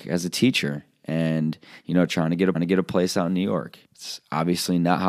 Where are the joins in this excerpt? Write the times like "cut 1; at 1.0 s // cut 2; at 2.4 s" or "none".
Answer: cut 1; at 2.5 s // cut 2; at 3.8 s